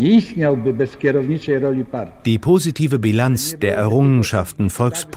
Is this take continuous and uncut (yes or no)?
yes